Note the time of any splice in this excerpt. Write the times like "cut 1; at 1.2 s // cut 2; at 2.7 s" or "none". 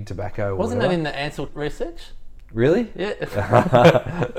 cut 1; at 1.5 s